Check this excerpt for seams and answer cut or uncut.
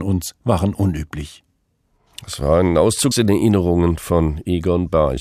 cut